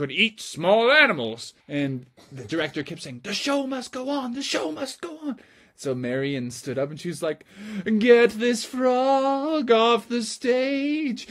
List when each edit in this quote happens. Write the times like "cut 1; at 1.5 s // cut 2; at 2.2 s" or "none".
cut 1; at 1.6 s